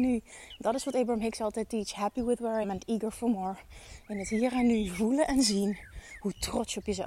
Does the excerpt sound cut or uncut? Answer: cut